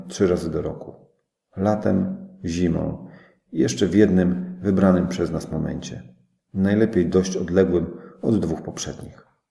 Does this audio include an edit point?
no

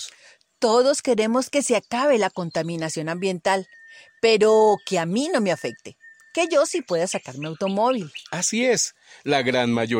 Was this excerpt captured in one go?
yes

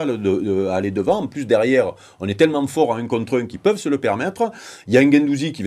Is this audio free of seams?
yes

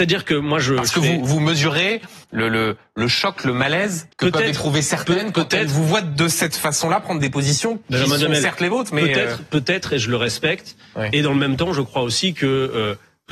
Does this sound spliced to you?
yes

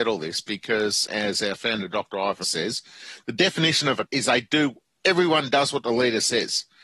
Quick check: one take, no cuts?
no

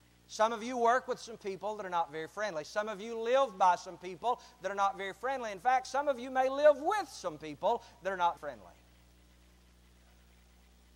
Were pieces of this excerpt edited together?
yes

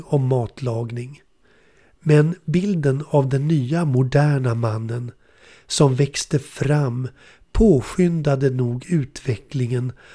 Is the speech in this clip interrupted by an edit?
no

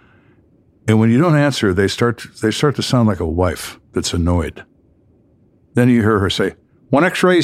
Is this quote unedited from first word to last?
yes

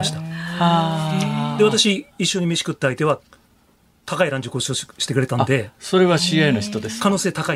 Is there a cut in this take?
no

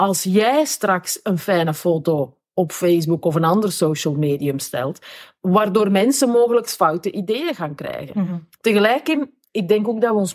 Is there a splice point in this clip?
no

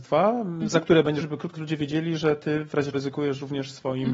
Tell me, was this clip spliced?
yes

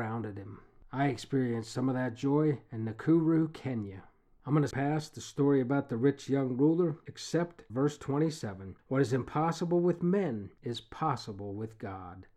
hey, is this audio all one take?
no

